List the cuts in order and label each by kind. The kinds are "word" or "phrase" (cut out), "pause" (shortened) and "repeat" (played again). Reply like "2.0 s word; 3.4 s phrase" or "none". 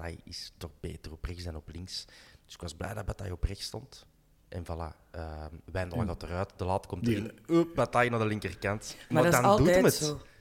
none